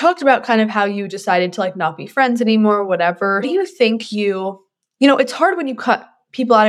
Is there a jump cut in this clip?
yes; 1 cut; at 3.4 s

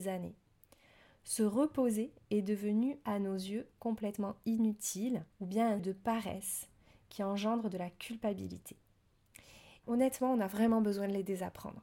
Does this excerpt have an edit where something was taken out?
yes; 3 cuts; at 5.3 s, 5.8 s, 9.8 s

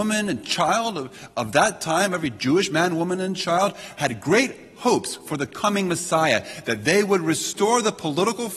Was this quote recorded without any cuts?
yes; 0 cuts

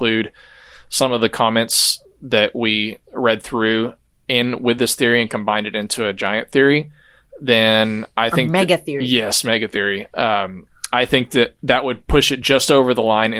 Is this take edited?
no; 0 cuts

